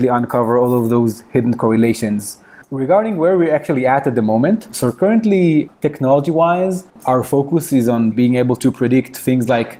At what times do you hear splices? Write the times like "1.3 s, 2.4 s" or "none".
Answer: 8.1 s